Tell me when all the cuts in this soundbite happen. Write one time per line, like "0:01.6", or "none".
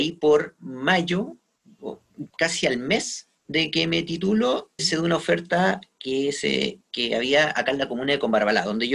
0:02.3
0:04.8